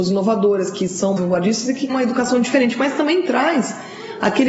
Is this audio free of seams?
no; 2 cuts; at 1.2 s, 1.9 s

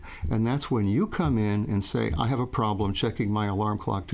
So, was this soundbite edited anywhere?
no; 0 cuts

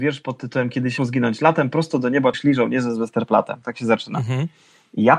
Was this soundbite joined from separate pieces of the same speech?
yes; 2 cuts; at 1.0 s, 2.3 s

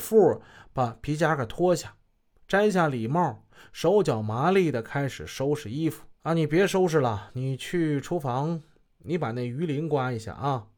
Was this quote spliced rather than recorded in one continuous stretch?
yes; 1 cut; at 6.2 s

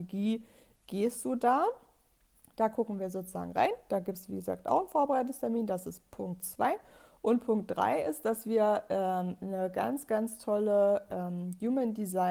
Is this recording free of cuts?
yes; 0 cuts

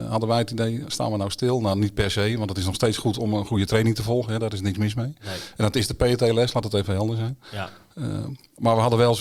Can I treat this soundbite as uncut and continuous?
yes; 0 cuts

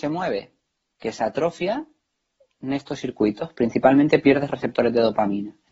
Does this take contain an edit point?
no; 0 cuts

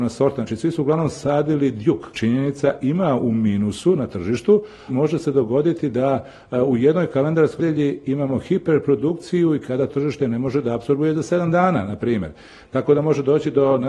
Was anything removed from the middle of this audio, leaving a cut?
yes; 4 cuts; at 2.1 s, 4.9 s, 7.6 s, 9.9 s

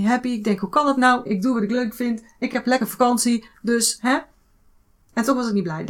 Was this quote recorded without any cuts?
yes; 0 cuts

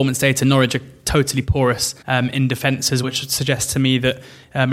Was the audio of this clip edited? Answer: yes; 2 cuts; at 2.0 s, 3.0 s

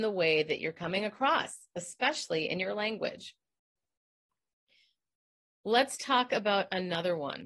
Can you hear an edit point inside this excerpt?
no; 0 cuts

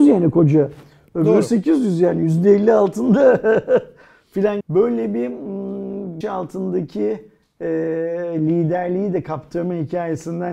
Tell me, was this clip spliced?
yes; 2 cuts; at 4.6 s, 6.2 s

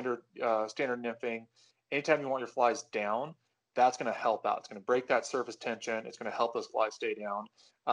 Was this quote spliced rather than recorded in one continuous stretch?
no; 0 cuts

